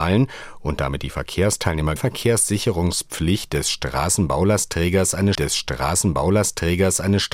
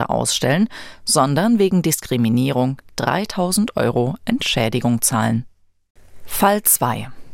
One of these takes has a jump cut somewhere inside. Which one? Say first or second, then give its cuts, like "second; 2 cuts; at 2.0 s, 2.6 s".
first; 2 cuts; at 2.0 s, 5.3 s